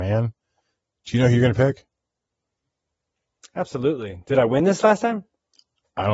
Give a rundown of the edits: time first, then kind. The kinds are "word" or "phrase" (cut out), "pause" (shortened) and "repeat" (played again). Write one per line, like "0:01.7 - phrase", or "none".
none